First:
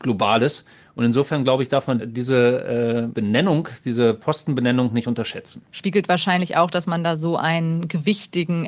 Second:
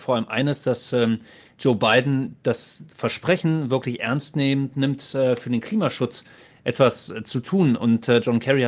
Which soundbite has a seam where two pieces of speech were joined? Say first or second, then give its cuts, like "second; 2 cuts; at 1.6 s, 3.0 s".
first; 3 cuts; at 2.0 s, 3.1 s, 5.7 s